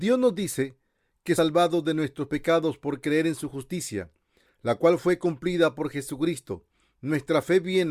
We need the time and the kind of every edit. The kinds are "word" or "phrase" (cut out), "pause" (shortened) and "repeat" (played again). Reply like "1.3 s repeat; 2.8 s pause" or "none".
1.4 s word